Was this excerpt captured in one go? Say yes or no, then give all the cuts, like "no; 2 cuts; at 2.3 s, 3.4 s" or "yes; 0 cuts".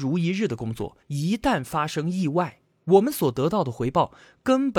no; 1 cut; at 1.0 s